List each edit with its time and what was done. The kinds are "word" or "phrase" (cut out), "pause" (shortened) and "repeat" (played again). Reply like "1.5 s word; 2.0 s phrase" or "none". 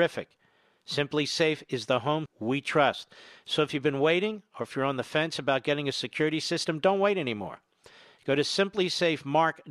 2.3 s word